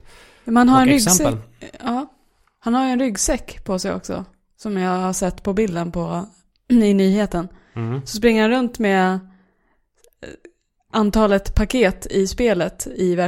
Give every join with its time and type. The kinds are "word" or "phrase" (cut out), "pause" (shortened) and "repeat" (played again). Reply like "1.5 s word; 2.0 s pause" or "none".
none